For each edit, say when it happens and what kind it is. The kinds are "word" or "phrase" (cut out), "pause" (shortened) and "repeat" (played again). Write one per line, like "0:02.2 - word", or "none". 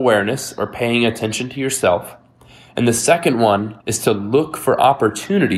0:03.8 - pause